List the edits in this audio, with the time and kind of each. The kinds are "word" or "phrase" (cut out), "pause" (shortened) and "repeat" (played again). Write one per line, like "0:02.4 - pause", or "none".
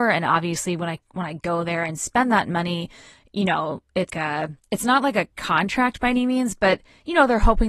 0:04.1 - word
0:05.3 - pause